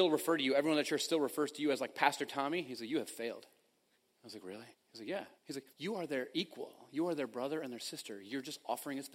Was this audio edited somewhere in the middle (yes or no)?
yes